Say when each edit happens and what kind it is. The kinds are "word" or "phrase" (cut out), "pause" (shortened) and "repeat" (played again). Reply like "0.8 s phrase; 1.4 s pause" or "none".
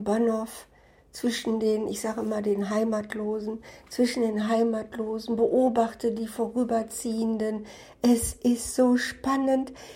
none